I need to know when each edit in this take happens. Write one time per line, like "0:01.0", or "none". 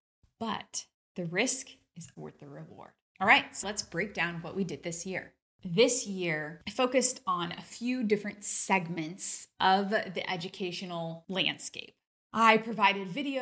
0:02.1
0:03.6